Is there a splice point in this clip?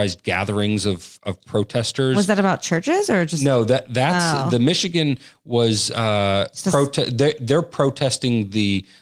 no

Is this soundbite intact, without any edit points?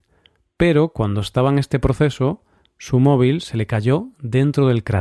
yes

